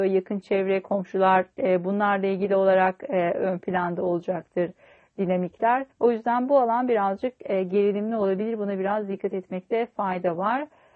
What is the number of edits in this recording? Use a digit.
1